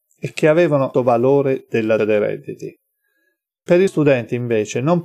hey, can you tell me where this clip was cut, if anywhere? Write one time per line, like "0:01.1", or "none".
0:00.9
0:02.0
0:03.9